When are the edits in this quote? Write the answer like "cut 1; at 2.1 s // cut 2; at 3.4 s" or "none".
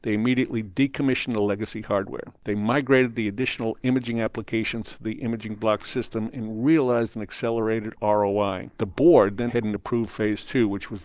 cut 1; at 8.7 s // cut 2; at 9.5 s